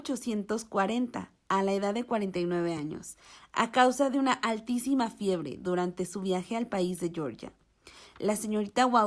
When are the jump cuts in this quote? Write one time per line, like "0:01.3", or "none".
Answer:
none

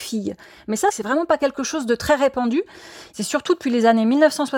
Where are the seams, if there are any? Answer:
none

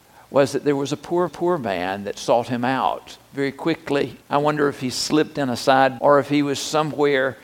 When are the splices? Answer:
0:01.3
0:04.2
0:06.0

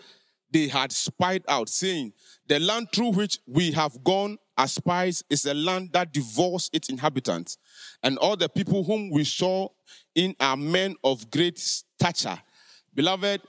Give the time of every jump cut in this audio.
none

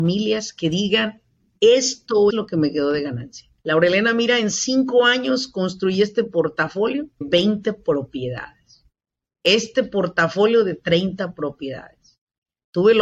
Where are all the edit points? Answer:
0:02.3
0:03.6
0:07.2

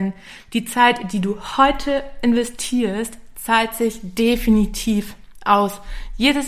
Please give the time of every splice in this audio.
none

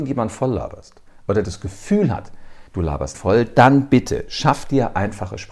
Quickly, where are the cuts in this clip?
0:01.4
0:02.7
0:03.1

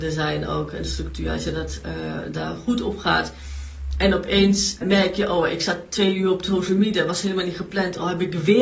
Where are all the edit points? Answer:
0:04.8

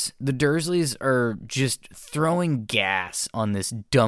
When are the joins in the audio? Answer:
none

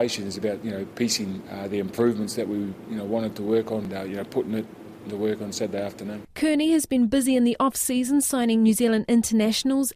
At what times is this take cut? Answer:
none

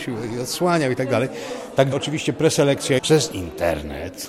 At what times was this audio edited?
0:01.9
0:03.0

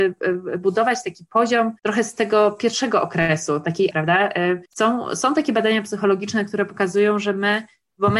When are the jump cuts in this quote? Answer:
0:01.8
0:03.9
0:04.7

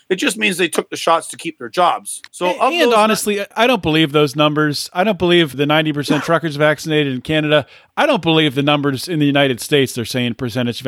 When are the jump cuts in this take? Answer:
0:02.3
0:03.5
0:05.5

